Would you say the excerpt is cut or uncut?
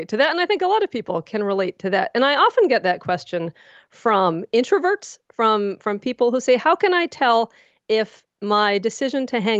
uncut